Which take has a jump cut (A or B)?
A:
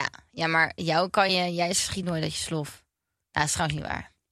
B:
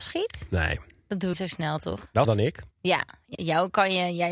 B